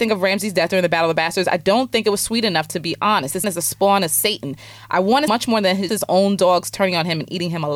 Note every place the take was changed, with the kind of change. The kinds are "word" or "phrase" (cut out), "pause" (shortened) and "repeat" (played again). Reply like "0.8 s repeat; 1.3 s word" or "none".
3.4 s word; 5.3 s word; 5.9 s word